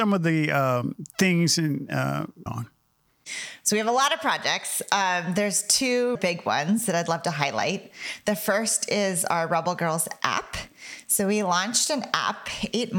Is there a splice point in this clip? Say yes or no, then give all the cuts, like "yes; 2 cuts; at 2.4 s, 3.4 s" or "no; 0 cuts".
yes; 2 cuts; at 2.5 s, 6.1 s